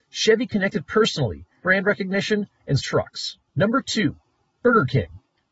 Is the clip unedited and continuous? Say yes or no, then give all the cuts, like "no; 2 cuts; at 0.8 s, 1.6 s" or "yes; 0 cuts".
no; 3 cuts; at 1.6 s, 2.8 s, 3.5 s